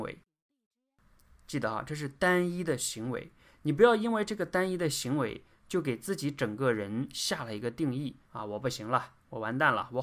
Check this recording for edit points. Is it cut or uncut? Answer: cut